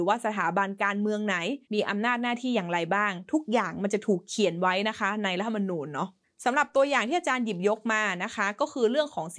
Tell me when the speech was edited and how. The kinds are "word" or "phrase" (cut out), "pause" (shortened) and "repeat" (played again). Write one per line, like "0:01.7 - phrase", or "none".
0:01.6 - pause
0:06.2 - pause